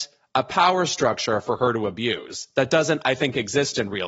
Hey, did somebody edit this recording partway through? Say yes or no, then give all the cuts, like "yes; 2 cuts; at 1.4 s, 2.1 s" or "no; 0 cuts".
no; 0 cuts